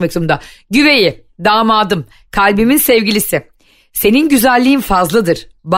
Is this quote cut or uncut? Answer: uncut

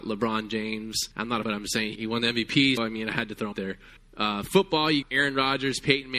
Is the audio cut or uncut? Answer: cut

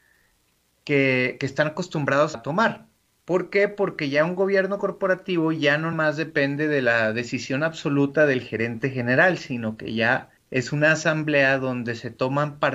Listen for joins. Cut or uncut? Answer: cut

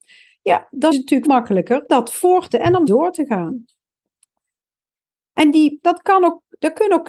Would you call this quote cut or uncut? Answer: cut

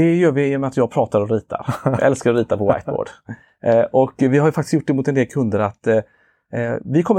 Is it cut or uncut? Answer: uncut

